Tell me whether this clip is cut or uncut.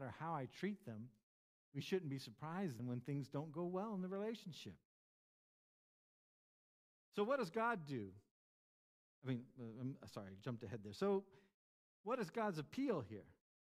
cut